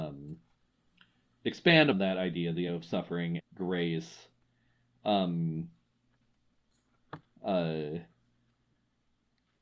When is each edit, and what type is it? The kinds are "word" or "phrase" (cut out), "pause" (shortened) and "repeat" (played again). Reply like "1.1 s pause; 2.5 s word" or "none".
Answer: 1.9 s word; 2.7 s word; 3.4 s word; 7.4 s word